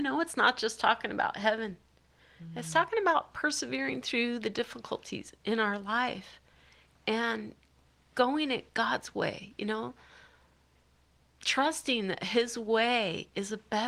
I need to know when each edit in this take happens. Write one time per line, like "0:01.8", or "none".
none